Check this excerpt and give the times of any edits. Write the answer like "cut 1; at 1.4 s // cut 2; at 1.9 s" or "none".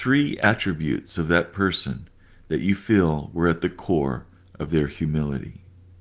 none